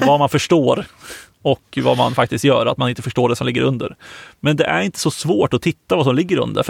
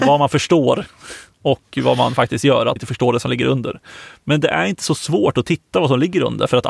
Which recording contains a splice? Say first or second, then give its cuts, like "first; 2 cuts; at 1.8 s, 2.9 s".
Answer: second; 1 cut; at 2.8 s